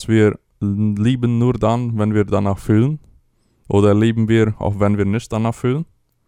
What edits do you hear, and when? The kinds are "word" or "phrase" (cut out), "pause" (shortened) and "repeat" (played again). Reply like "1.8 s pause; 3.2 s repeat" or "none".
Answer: none